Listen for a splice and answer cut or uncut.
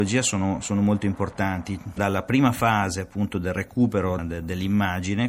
cut